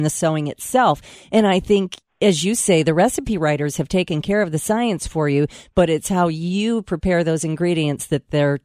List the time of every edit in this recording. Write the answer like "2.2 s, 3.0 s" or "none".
none